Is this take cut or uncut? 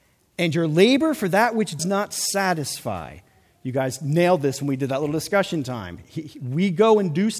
cut